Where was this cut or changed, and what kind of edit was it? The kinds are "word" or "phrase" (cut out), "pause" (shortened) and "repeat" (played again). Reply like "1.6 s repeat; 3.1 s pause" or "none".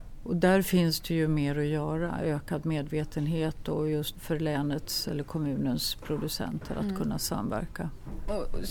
4.1 s phrase